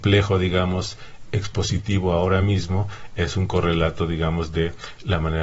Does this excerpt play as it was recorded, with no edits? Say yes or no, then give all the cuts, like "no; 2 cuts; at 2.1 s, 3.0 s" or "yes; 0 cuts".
yes; 0 cuts